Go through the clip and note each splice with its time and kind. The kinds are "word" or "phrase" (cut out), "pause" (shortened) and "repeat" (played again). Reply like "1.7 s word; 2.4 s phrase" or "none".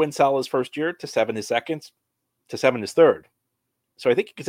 none